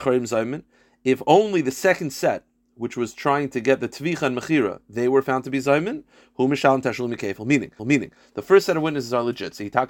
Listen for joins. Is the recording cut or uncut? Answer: cut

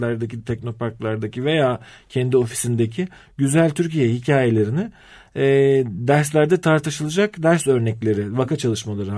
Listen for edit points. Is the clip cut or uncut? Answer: uncut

